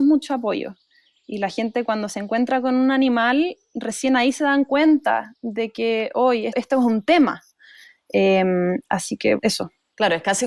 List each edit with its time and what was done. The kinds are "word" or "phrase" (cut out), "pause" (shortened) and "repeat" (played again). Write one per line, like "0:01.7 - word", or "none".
0:06.5 - word
0:09.4 - word